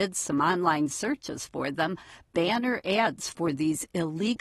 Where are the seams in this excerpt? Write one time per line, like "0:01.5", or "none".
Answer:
none

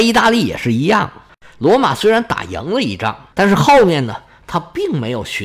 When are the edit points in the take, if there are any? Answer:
none

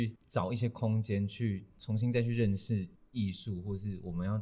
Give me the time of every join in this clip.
0:02.9

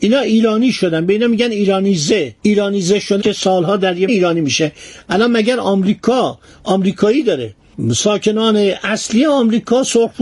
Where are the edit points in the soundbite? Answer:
0:02.4
0:03.2
0:04.1

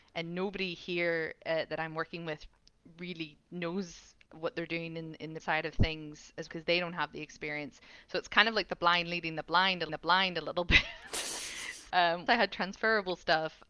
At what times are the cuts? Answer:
0:05.4
0:06.5
0:09.9
0:11.9
0:12.3

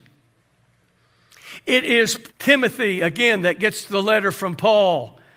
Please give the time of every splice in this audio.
0:02.3

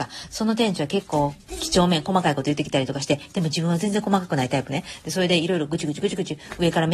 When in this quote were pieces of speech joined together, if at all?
none

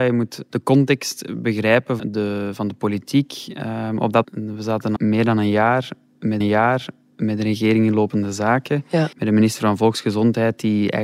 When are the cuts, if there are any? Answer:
0:02.0
0:04.2
0:05.0
0:06.4
0:09.1

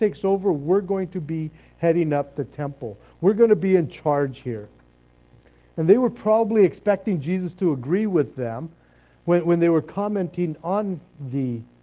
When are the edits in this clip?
none

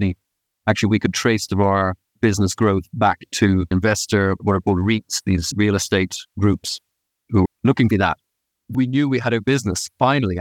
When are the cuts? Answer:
0:01.5
0:03.7
0:05.5
0:07.5
0:07.9
0:08.7
0:09.4

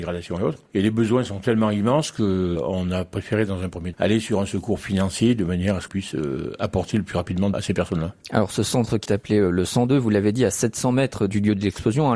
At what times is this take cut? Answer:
0:03.9
0:05.9
0:07.5
0:09.1

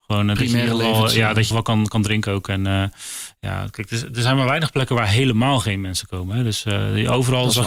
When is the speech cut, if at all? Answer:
0:01.5

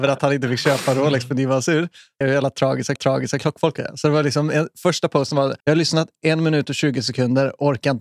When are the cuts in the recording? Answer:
0:02.2
0:03.0
0:05.6

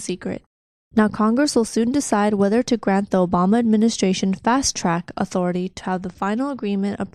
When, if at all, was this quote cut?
none

